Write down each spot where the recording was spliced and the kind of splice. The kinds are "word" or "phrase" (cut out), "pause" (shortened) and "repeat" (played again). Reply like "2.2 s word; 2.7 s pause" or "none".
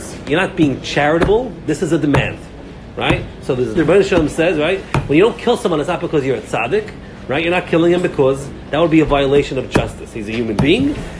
3.8 s word